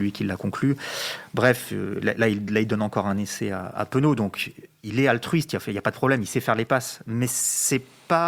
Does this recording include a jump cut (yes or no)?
no